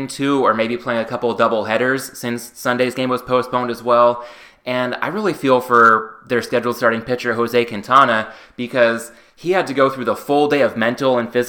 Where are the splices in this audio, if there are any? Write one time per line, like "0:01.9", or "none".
none